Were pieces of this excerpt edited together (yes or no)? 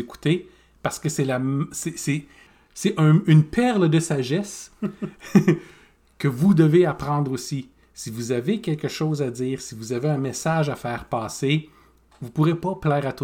no